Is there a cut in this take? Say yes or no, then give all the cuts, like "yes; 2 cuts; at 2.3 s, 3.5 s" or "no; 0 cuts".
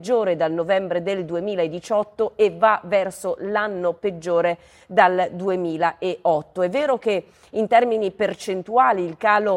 no; 0 cuts